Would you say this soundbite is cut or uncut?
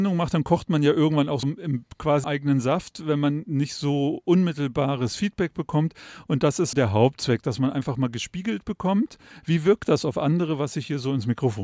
cut